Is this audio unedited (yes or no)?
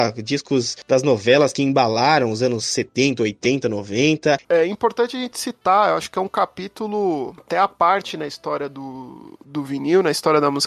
yes